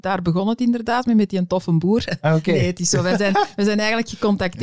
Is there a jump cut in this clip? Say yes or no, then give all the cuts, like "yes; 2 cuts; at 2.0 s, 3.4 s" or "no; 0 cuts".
no; 0 cuts